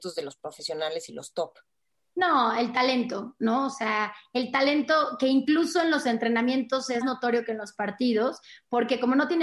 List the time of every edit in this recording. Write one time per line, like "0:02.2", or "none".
0:07.0